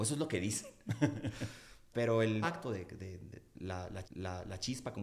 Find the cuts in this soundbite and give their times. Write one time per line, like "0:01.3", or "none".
0:01.9
0:02.4
0:04.0